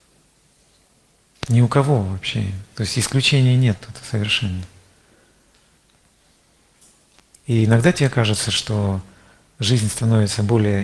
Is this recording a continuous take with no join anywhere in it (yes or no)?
yes